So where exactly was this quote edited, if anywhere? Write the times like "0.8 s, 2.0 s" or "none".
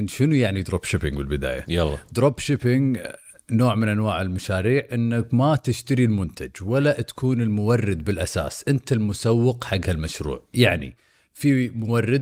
none